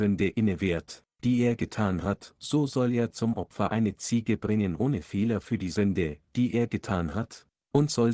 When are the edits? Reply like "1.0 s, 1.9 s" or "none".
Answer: none